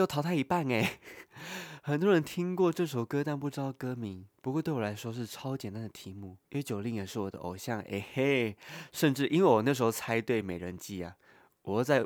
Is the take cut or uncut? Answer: cut